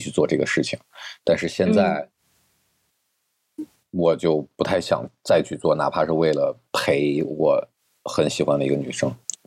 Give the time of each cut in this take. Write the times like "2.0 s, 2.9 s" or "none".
none